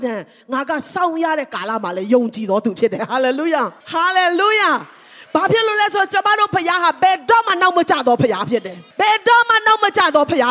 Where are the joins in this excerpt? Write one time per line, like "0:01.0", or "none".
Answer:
0:03.8
0:08.9